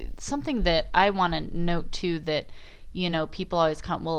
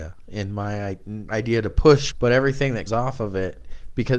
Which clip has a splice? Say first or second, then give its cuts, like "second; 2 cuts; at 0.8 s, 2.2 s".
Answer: second; 3 cuts; at 1.3 s, 2.1 s, 2.9 s